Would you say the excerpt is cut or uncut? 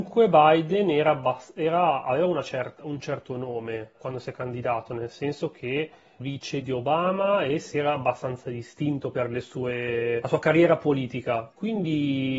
cut